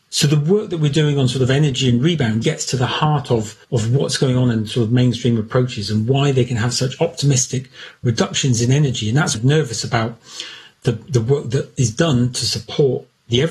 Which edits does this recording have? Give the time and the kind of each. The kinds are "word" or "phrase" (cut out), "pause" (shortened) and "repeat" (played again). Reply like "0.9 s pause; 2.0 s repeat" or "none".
2.4 s word; 3.6 s pause; 9.3 s phrase